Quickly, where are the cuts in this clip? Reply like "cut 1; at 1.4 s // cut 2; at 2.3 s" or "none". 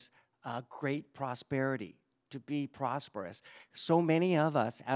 none